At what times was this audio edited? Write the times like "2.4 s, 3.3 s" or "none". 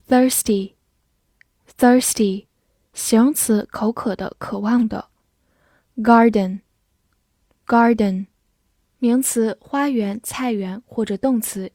none